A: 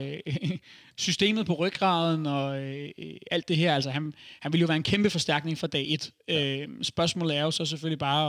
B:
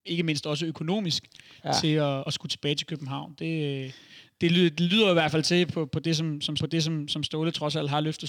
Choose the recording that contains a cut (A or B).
B